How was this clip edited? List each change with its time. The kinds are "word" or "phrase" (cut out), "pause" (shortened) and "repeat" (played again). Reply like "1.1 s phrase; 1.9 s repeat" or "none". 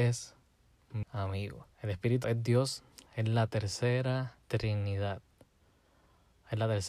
1.0 s word; 1.7 s pause; 2.2 s word; 3.1 s pause; 4.4 s pause